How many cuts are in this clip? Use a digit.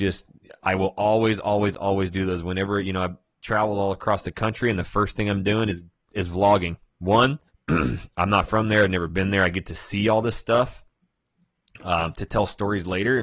1